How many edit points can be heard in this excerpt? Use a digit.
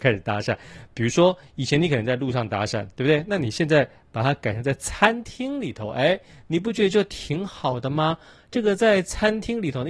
0